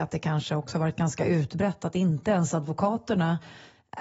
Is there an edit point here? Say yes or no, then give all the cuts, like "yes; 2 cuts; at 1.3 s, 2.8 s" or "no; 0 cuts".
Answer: no; 0 cuts